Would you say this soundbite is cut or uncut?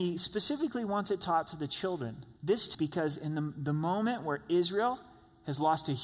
cut